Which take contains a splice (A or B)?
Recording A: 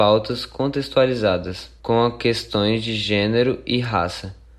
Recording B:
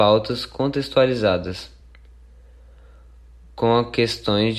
A